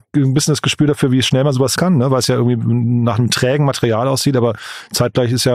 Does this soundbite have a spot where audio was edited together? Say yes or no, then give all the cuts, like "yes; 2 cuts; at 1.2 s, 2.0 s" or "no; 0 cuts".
yes; 1 cut; at 1.8 s